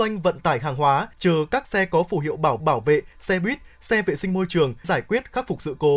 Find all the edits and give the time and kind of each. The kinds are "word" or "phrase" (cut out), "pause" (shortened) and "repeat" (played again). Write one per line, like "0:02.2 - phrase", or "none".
0:01.1 - pause
0:02.6 - repeat
0:04.8 - word